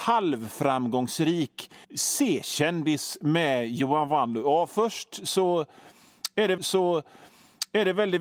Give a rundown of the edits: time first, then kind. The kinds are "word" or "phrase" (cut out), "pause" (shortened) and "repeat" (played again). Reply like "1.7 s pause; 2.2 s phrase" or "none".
1.8 s pause; 6.6 s repeat